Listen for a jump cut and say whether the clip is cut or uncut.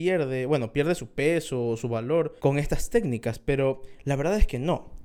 cut